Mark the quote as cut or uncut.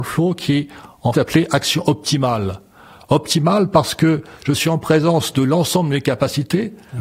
cut